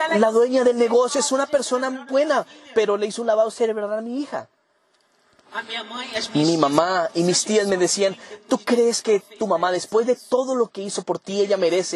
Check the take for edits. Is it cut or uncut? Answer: uncut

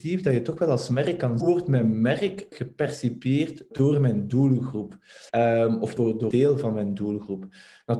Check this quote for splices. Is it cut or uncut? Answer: cut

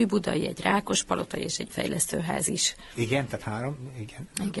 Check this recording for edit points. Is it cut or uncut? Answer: cut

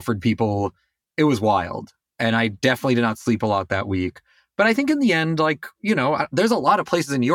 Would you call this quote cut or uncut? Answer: uncut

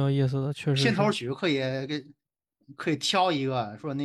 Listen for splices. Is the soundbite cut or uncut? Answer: uncut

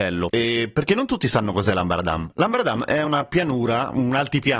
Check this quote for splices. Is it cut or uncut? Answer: uncut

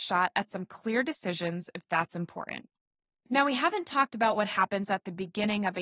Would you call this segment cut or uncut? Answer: uncut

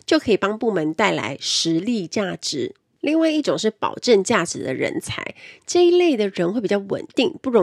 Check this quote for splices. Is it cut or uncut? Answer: uncut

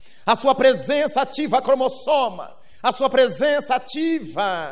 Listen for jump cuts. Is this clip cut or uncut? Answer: uncut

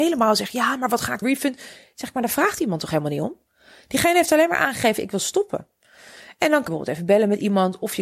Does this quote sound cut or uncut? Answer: cut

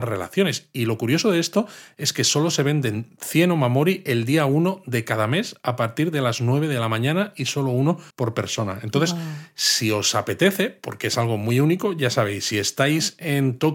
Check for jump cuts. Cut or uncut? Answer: cut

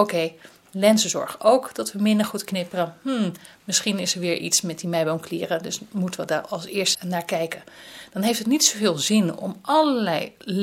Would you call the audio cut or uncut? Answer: cut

